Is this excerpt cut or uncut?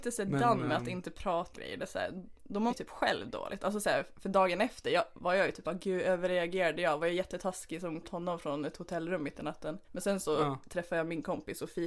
cut